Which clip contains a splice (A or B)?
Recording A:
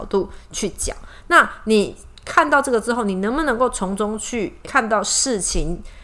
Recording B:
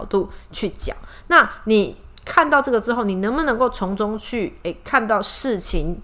A